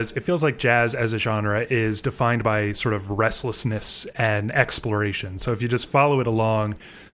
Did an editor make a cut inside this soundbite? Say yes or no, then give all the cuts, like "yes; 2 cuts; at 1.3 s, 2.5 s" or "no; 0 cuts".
no; 0 cuts